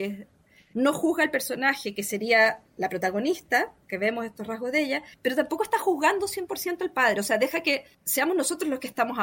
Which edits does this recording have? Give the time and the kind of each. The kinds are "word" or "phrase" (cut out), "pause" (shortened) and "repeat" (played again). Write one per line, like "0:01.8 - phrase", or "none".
0:05.1 - pause
0:07.9 - pause